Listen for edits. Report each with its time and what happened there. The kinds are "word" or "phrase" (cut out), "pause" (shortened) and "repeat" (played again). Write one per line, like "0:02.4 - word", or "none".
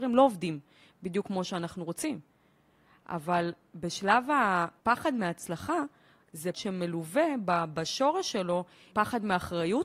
0:06.5 - word
0:08.9 - word